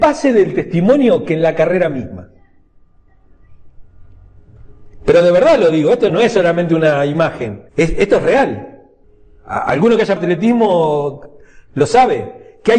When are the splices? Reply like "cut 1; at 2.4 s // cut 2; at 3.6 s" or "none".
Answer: cut 1; at 6.1 s // cut 2; at 7.7 s // cut 3; at 9.0 s // cut 4; at 10.2 s